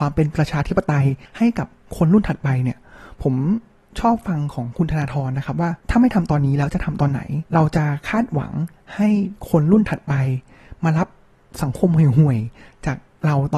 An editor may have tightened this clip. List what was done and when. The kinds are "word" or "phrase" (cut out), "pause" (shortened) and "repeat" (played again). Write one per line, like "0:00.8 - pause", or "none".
0:01.3 - pause
0:05.8 - pause
0:07.5 - pause